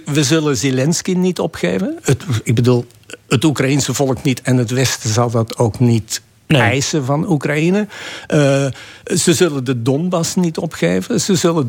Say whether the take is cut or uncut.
uncut